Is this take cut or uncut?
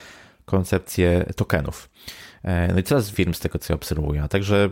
cut